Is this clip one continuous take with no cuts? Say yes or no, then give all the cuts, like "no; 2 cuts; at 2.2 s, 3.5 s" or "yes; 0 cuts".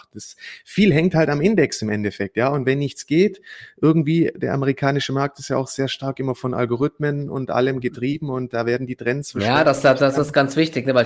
yes; 0 cuts